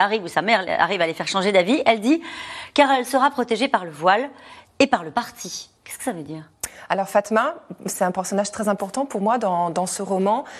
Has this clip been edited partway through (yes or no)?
yes